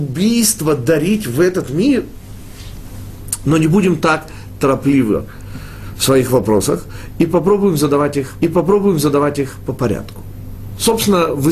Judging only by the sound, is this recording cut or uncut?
cut